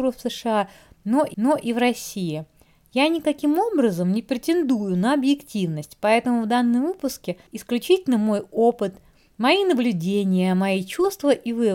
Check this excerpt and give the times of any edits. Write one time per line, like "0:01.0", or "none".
0:01.3
0:07.5